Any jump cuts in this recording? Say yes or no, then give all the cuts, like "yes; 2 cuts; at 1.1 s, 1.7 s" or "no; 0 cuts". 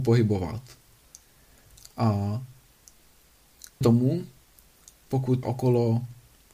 yes; 2 cuts; at 3.8 s, 5.4 s